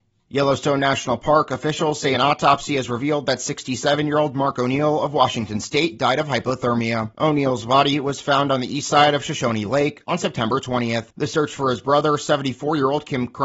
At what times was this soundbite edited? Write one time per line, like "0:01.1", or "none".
none